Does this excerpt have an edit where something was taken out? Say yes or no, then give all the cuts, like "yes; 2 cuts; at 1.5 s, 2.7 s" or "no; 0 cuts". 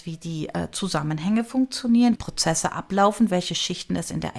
yes; 1 cut; at 2.2 s